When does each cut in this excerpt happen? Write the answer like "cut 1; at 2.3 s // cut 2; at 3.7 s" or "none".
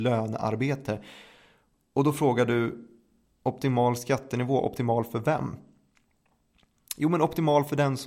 none